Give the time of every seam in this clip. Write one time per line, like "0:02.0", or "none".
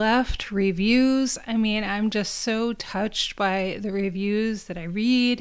none